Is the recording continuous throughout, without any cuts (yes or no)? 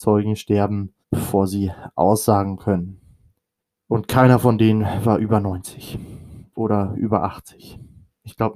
no